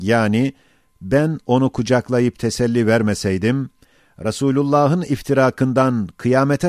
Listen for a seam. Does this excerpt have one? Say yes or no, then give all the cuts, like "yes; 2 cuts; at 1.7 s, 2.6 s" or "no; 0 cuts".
no; 0 cuts